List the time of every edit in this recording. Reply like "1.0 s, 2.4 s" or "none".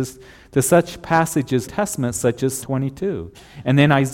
1.6 s, 2.6 s